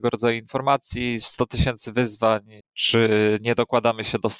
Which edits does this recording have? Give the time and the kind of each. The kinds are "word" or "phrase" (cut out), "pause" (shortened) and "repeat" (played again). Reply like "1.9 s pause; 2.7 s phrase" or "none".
2.6 s pause